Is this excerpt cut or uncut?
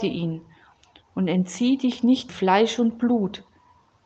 cut